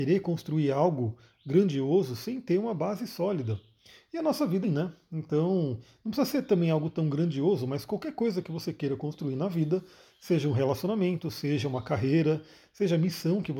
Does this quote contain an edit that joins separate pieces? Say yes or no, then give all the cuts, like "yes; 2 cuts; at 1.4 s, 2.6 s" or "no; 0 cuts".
yes; 1 cut; at 4.6 s